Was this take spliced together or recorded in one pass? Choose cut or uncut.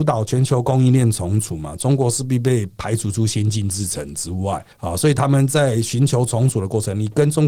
cut